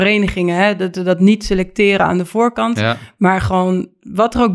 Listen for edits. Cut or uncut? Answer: uncut